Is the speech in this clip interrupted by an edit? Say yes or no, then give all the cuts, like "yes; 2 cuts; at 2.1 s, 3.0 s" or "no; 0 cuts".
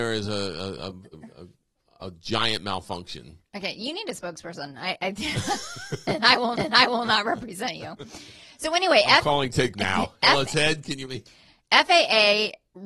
yes; 4 cuts; at 1.1 s, 6.5 s, 9.7 s, 11.0 s